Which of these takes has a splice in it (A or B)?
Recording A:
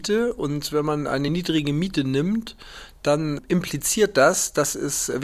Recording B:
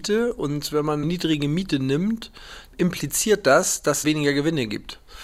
B